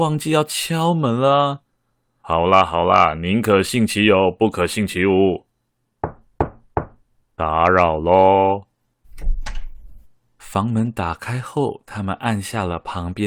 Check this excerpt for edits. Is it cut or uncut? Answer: uncut